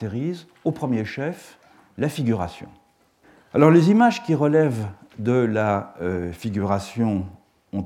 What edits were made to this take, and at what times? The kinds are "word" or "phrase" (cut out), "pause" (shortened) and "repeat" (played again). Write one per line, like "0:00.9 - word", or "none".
0:03.2 - pause

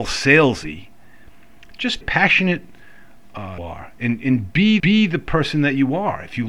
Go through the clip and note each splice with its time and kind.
0:02.0 - phrase
0:03.6 - phrase
0:04.8 - repeat

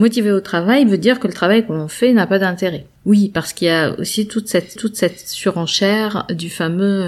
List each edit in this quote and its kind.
0:02.9 - pause
0:04.8 - repeat

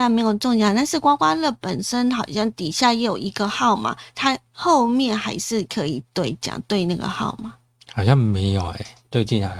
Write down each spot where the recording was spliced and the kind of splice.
0:04.5 - pause

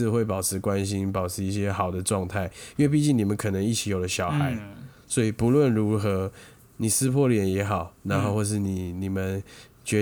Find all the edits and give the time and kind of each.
none

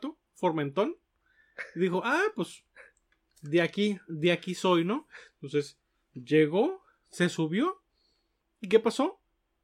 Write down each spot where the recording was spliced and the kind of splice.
none

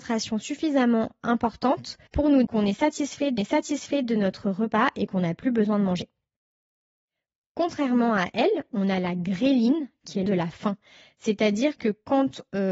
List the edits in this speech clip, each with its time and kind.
0:02.1 - pause
0:02.4 - word
0:03.4 - repeat
0:10.3 - word

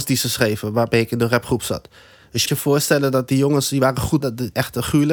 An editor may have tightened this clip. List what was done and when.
0:02.5 - word
0:04.2 - word

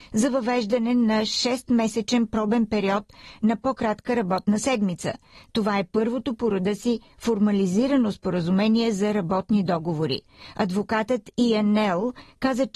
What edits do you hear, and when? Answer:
none

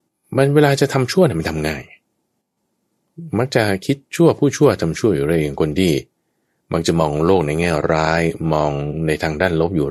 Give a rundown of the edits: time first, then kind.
0:04.0 - pause

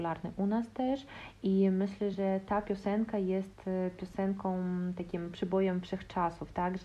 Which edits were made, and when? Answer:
none

